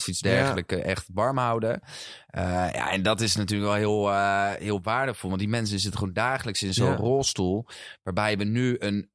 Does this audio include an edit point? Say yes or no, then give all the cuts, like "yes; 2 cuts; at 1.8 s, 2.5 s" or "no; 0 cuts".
no; 0 cuts